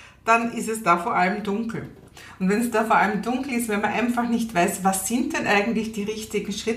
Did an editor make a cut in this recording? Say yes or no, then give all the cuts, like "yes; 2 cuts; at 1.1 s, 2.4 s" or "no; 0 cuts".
no; 0 cuts